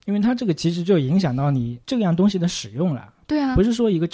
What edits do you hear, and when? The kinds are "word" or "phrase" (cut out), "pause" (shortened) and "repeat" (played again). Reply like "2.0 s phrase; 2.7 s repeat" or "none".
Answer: 1.8 s pause